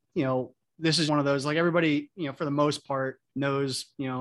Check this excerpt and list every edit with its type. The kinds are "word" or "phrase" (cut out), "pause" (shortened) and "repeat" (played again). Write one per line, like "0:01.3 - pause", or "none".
0:01.1 - word
0:03.3 - pause